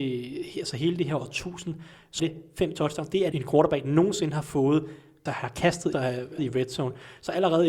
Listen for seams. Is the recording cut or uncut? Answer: cut